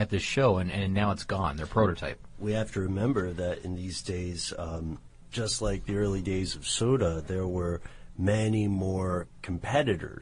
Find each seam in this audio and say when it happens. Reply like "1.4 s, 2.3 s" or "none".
none